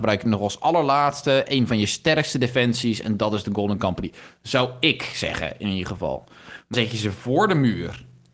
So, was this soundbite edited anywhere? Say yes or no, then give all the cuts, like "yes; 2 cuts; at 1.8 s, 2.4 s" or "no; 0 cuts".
yes; 1 cut; at 6.7 s